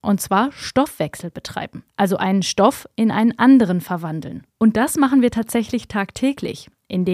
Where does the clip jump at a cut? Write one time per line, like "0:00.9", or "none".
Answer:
0:01.9
0:04.5